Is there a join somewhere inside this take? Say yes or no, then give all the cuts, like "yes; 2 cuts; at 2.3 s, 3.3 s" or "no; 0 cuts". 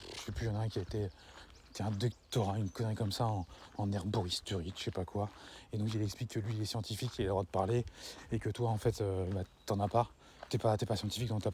no; 0 cuts